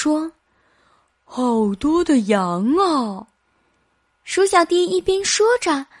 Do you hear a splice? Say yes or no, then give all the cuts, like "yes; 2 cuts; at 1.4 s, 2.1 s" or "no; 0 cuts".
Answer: yes; 1 cut; at 3.4 s